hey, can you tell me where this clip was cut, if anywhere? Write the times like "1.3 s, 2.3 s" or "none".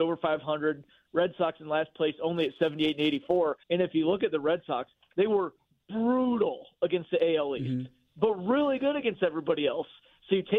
3.6 s